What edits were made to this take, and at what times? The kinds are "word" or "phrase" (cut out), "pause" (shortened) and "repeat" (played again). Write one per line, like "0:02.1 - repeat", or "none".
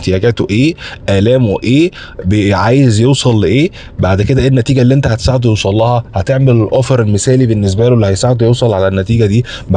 none